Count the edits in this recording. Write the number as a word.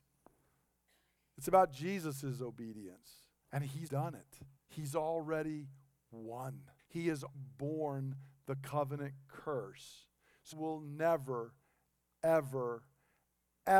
six